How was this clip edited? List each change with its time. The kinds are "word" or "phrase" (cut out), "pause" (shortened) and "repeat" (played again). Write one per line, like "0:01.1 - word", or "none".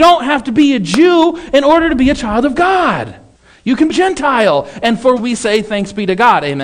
0:03.3 - pause
0:03.9 - phrase
0:05.2 - word